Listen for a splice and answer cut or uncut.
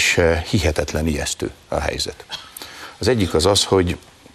uncut